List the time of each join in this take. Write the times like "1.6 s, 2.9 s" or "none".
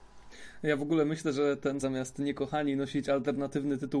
1.8 s